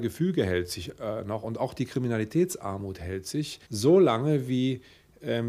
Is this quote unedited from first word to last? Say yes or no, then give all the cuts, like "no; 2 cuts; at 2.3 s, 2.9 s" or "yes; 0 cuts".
no; 1 cut; at 3.7 s